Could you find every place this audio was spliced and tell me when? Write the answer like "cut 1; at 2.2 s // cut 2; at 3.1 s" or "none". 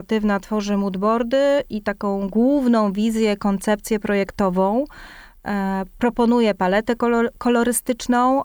none